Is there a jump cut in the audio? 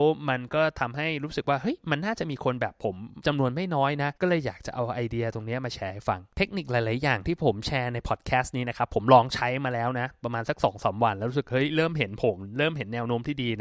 yes; 2 cuts; at 4.2 s, 6.3 s

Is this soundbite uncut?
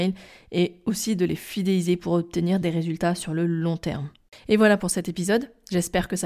yes; 0 cuts

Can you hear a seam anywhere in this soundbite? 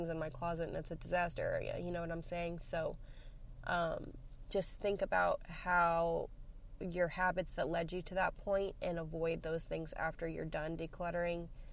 no; 0 cuts

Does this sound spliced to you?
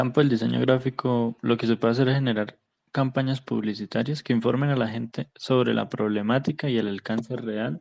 no; 0 cuts

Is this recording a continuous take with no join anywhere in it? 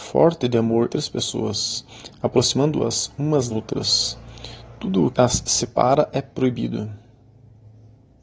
no; 3 cuts; at 0.9 s, 3.5 s, 5.1 s

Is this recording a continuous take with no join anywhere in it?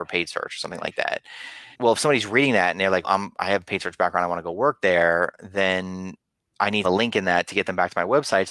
no; 3 cuts; at 1.7 s, 3.0 s, 6.8 s

